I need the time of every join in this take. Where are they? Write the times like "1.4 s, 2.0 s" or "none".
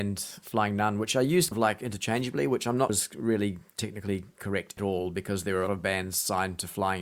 1.5 s, 2.9 s, 4.8 s, 5.7 s